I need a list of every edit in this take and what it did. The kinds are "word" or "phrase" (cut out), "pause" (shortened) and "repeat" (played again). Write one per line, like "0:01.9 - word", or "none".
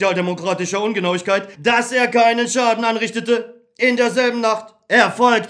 0:01.5 - pause